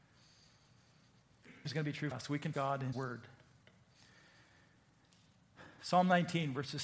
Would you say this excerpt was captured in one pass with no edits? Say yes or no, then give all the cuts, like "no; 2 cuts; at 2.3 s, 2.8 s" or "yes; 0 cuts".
no; 4 cuts; at 1.6 s, 2.1 s, 2.5 s, 2.9 s